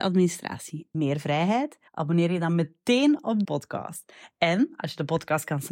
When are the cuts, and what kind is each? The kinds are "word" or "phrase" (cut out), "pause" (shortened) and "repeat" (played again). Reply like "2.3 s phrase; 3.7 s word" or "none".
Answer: 0.9 s word; 1.9 s pause; 3.4 s word

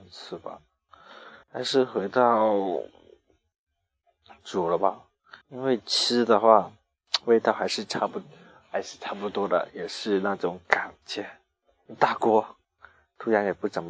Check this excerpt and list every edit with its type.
1.4 s pause; 5.4 s pause

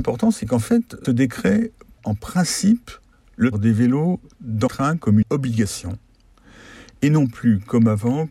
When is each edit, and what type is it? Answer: 1.0 s word; 2.0 s word; 3.5 s word; 4.7 s word; 5.2 s word

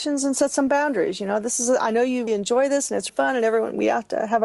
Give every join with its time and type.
2.3 s word; 3.1 s word

